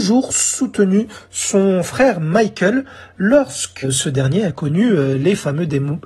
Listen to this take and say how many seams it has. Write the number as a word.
one